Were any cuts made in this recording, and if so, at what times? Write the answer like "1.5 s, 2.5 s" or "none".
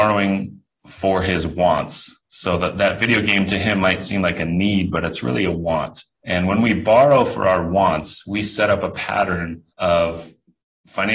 2.2 s, 6.1 s, 9.7 s